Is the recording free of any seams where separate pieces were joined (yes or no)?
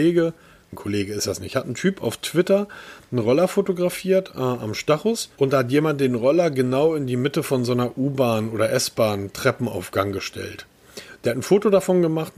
no